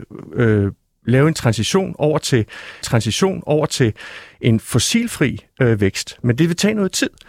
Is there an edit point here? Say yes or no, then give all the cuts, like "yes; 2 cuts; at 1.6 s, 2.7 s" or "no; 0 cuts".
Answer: yes; 1 cut; at 2.8 s